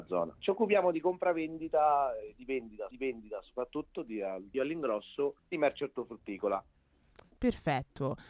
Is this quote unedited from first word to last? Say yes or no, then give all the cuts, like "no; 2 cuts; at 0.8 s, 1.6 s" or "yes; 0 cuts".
no; 3 cuts; at 2.9 s, 4.5 s, 5.4 s